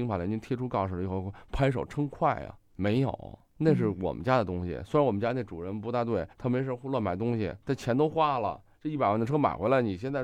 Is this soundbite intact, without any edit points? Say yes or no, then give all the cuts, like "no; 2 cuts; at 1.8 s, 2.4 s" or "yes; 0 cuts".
no; 1 cut; at 6.3 s